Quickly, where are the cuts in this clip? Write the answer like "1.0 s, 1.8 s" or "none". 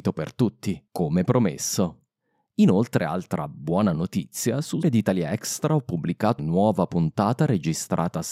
4.8 s, 6.4 s